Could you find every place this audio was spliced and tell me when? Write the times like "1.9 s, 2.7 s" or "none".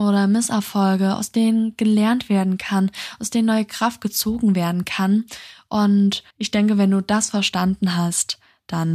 6.3 s